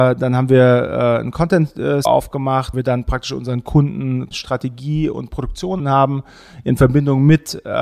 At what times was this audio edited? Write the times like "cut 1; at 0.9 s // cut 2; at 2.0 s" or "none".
cut 1; at 2.1 s // cut 2; at 2.7 s // cut 3; at 4.3 s // cut 4; at 5.8 s